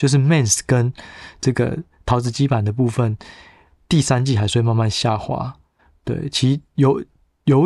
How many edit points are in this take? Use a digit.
0